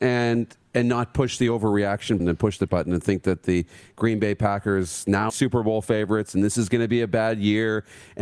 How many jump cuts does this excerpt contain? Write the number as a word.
three